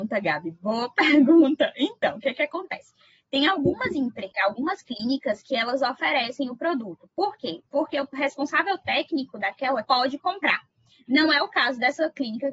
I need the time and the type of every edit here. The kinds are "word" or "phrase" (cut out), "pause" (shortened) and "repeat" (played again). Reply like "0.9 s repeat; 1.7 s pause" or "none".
9.8 s word